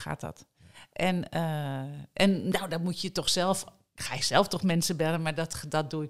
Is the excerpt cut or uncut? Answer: uncut